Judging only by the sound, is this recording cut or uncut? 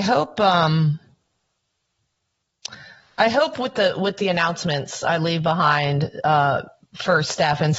uncut